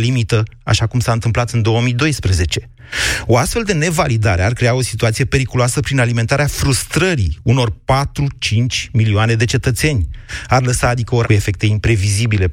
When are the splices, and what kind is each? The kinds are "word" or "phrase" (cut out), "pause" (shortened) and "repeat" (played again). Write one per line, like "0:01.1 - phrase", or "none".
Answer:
0:11.2 - phrase

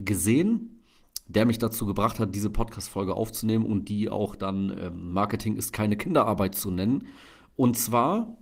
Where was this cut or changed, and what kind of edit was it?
none

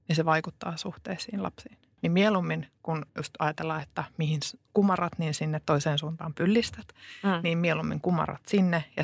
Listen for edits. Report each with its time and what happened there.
0:03.1 - pause

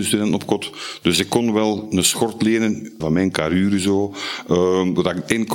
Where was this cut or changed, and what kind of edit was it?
0:03.0 - word

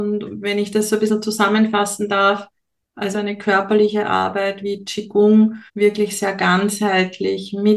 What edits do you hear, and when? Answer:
0:03.1 - phrase
0:04.6 - word
0:05.7 - pause

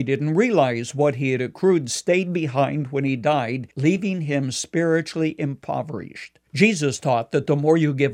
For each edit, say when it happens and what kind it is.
0:03.7 - pause
0:06.5 - pause

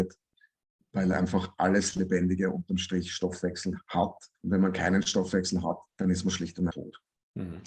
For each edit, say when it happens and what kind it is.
0:04.3 - pause
0:05.9 - pause
0:06.7 - word

